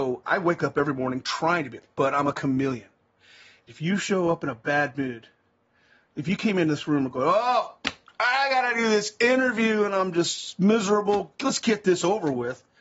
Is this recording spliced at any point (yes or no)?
no